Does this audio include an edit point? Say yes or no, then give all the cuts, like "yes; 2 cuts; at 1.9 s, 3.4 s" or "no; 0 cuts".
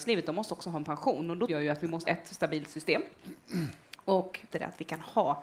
yes; 3 cuts; at 1.5 s, 2.0 s, 4.5 s